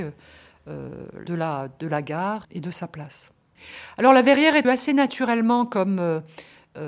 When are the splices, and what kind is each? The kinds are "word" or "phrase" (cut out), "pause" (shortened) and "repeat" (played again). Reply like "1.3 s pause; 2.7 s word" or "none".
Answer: 1.3 s phrase; 2.4 s word; 4.6 s word